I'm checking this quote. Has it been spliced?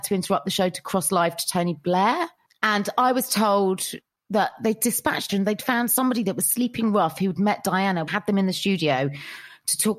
yes; 2 cuts; at 5.3 s, 8.1 s

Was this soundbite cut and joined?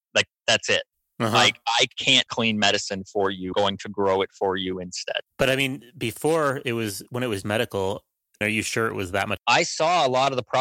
yes; 6 cuts; at 2.3 s, 3.5 s, 5.3 s, 7.4 s, 8.4 s, 9.4 s

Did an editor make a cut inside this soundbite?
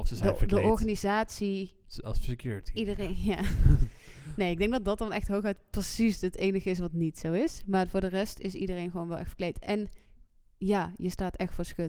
no; 0 cuts

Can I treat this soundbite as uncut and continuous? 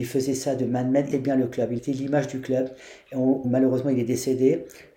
no; 3 cuts; at 1.1 s, 1.8 s, 3.4 s

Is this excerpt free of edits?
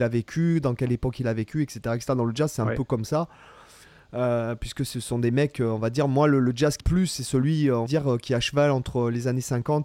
no; 2 cuts; at 6.8 s, 7.9 s

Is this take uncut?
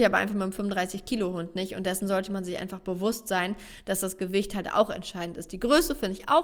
yes; 0 cuts

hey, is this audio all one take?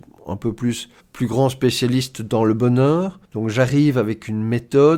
no; 2 cuts; at 1.0 s, 3.2 s

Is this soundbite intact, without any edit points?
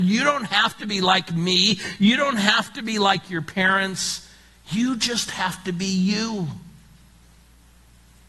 yes; 0 cuts

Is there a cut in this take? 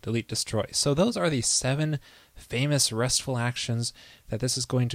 no; 0 cuts

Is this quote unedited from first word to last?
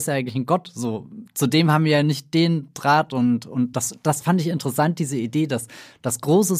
yes; 0 cuts

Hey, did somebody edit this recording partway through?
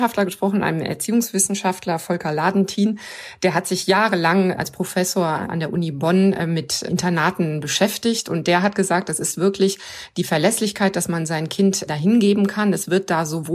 no; 0 cuts

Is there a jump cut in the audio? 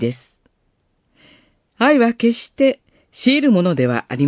no; 0 cuts

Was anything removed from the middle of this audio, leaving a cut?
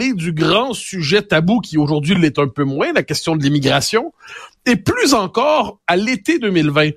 no; 0 cuts

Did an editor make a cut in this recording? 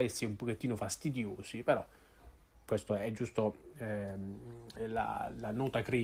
no; 0 cuts

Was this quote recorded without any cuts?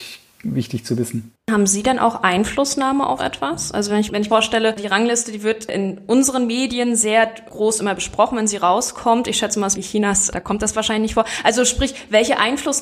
no; 3 cuts; at 3.2 s, 4.3 s, 9.7 s

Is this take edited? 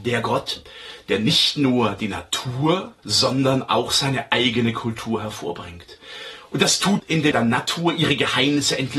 yes; 3 cuts; at 3.0 s, 7.0 s, 7.3 s

